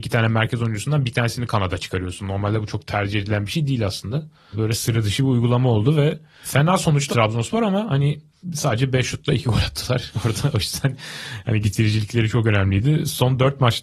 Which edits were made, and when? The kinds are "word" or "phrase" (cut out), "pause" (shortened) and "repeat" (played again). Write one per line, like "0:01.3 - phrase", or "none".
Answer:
0:07.1 - word
0:11.6 - word